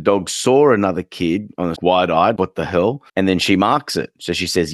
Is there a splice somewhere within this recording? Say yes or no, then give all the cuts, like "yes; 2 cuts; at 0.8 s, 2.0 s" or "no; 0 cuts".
yes; 3 cuts; at 1.8 s, 2.4 s, 3.1 s